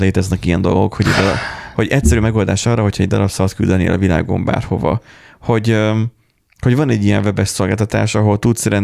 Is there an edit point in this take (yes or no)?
no